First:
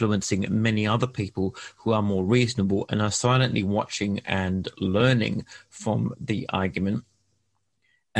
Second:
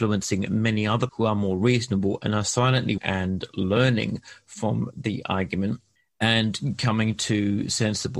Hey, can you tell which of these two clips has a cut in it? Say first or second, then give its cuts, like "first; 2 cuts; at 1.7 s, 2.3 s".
second; 3 cuts; at 1.1 s, 3.0 s, 6.0 s